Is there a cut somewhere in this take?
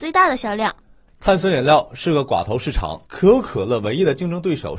yes; 1 cut; at 3.0 s

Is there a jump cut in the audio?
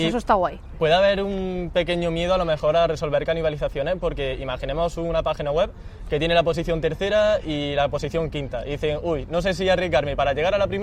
no; 0 cuts

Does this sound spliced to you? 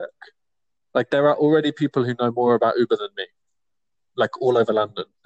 no; 0 cuts

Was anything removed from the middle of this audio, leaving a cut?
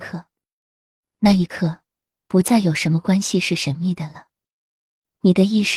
no; 0 cuts

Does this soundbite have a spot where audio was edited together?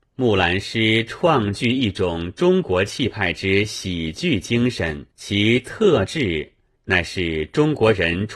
yes; 2 cuts; at 5.1 s, 6.7 s

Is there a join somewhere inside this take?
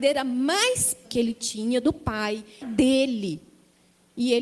yes; 2 cuts; at 1.0 s, 2.6 s

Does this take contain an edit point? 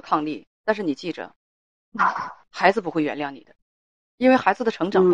yes; 1 cut; at 3.7 s

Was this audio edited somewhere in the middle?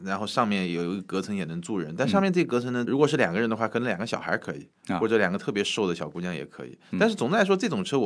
yes; 1 cut; at 2.9 s

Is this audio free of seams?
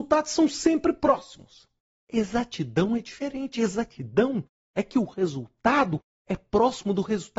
yes; 0 cuts

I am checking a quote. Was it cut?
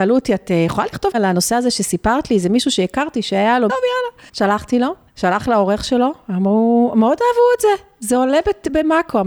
yes; 4 cuts; at 1.1 s, 3.7 s, 4.3 s, 5.1 s

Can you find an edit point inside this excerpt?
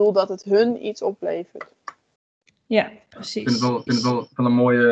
yes; 2 cuts; at 2.2 s, 3.9 s

